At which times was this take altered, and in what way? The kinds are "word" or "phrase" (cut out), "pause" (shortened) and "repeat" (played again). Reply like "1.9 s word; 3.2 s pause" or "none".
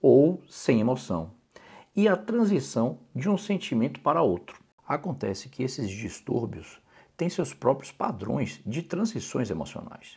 none